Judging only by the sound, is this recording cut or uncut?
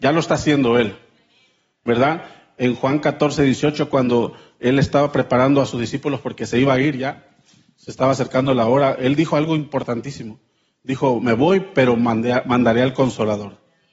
uncut